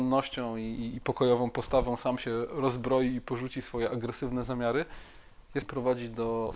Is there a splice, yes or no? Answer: yes